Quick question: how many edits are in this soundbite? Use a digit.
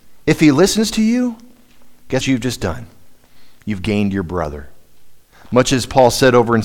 1